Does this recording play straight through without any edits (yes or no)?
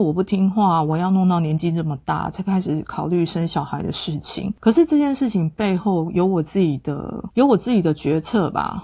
no